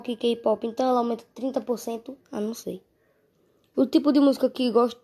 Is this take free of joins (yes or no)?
no